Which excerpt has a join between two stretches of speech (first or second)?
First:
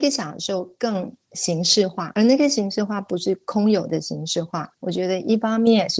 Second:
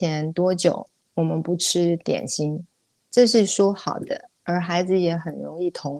first